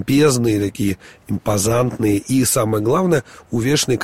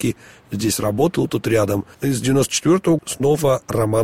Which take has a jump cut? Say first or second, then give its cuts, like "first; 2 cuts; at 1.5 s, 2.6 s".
second; 3 cuts; at 1.3 s, 1.9 s, 3.0 s